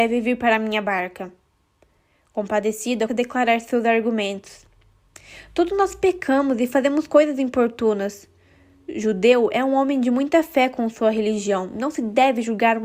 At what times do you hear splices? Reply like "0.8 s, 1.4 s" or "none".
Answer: 3.1 s